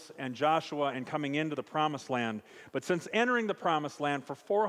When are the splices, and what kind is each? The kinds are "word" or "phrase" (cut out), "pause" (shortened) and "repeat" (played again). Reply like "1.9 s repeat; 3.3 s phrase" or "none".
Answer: none